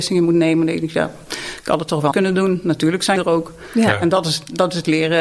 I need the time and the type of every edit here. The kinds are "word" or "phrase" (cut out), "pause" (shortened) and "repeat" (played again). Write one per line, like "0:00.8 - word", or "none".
0:02.1 - word
0:03.2 - word